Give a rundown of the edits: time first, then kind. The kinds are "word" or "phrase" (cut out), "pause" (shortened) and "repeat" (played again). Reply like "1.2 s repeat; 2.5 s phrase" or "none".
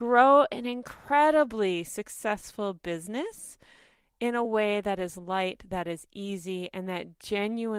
none